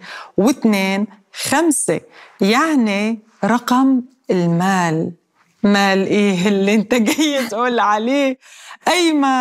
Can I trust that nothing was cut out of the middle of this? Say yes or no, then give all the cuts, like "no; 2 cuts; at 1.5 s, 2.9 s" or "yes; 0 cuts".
yes; 0 cuts